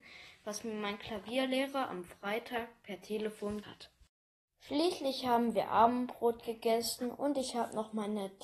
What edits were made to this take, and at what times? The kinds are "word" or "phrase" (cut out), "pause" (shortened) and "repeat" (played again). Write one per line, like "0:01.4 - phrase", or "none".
0:03.6 - word